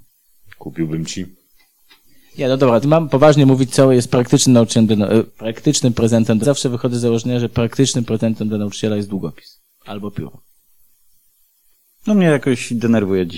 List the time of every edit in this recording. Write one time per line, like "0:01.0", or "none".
0:02.8
0:05.3
0:06.4